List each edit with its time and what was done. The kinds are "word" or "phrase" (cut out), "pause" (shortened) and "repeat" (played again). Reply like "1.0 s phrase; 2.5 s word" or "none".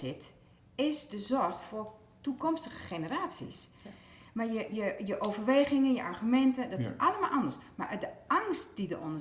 none